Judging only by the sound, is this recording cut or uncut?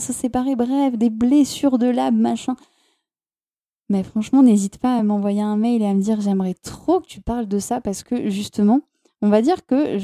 uncut